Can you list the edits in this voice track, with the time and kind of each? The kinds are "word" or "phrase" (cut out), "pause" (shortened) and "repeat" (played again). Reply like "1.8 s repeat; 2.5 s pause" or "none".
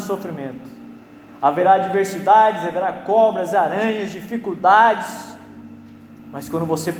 none